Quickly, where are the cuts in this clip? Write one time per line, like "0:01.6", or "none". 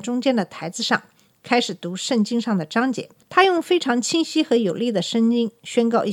0:03.2